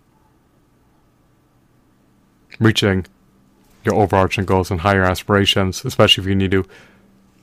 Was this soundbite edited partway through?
no; 0 cuts

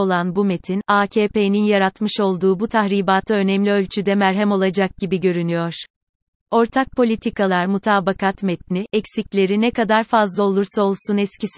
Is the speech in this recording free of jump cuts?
yes; 0 cuts

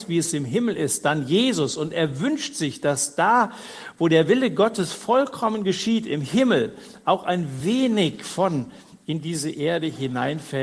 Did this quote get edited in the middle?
no; 0 cuts

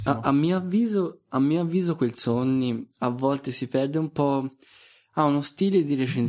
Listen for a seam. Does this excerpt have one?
no; 0 cuts

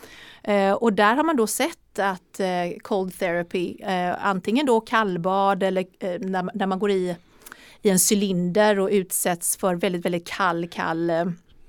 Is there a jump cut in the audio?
no; 0 cuts

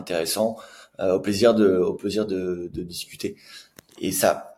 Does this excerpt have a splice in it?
no; 0 cuts

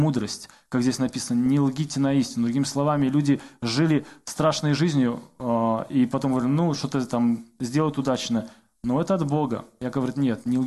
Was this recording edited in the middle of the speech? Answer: no; 0 cuts

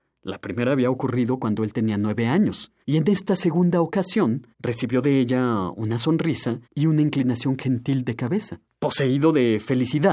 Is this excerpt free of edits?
no; 4 cuts; at 2.8 s, 4.5 s, 6.6 s, 8.7 s

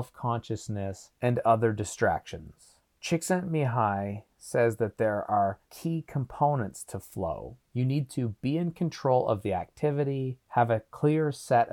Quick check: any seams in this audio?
no; 0 cuts

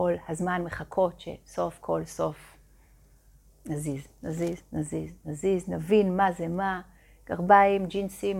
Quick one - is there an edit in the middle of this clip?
no; 0 cuts

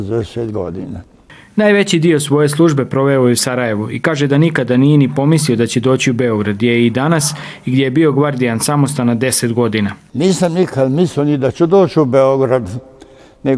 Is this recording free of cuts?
yes; 0 cuts

